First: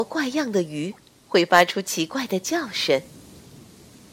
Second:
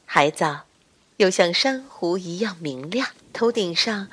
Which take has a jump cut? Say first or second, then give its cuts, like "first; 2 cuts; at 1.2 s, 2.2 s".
second; 1 cut; at 3.2 s